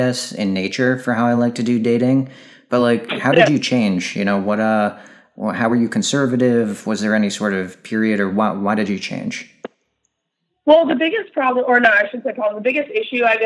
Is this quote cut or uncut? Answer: uncut